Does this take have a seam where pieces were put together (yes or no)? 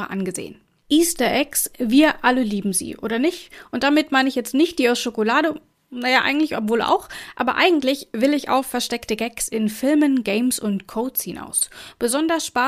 no